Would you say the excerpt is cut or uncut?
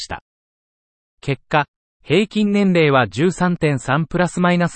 uncut